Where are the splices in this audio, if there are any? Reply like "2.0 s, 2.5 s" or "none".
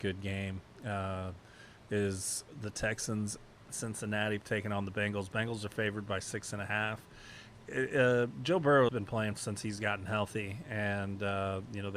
3.7 s, 8.9 s, 9.4 s